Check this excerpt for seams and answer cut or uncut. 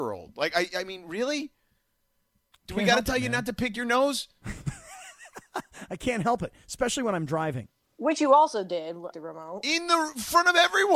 cut